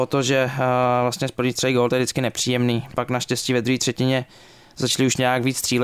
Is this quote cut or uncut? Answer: uncut